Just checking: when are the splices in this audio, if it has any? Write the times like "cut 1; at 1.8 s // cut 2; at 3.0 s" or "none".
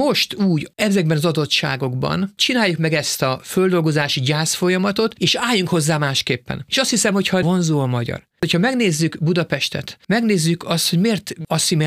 cut 1; at 7.4 s